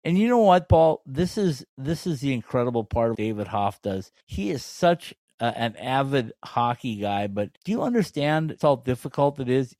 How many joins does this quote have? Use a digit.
4